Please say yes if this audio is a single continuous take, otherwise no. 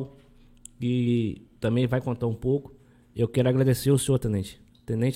yes